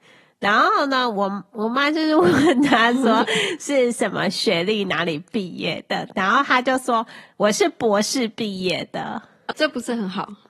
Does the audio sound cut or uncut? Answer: cut